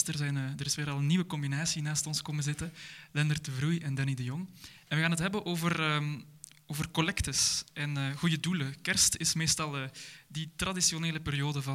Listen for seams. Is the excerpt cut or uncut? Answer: uncut